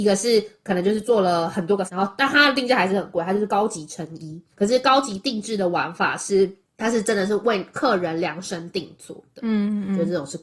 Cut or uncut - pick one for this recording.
cut